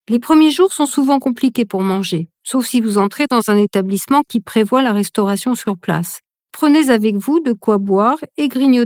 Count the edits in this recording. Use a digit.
0